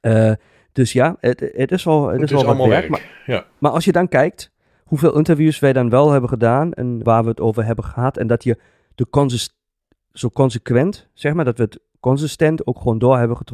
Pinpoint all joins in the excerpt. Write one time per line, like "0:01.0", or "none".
0:07.0